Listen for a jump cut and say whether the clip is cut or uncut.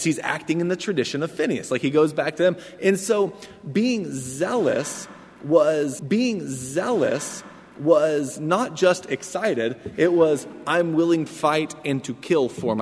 cut